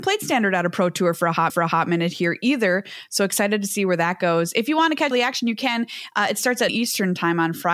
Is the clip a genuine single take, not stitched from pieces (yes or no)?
no